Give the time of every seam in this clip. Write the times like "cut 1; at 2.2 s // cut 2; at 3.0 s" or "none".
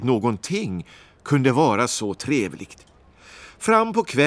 none